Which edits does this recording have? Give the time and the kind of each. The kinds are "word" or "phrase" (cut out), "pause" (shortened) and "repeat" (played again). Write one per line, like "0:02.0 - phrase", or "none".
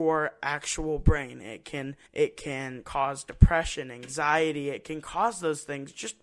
0:02.1 - pause

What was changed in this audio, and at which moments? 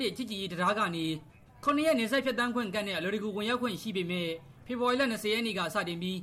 0:01.3 - pause

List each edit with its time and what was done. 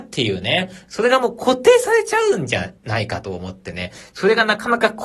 0:02.8 - pause

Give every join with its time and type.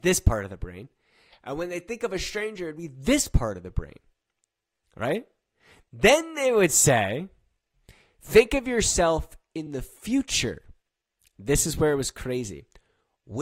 none

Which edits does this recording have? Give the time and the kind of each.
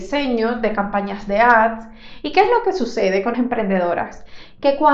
0:03.3 - word

